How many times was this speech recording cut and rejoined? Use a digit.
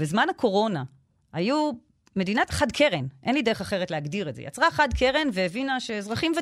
1